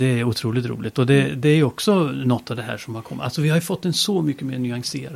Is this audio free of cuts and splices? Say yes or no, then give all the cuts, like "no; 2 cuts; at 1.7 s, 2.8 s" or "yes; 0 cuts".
yes; 0 cuts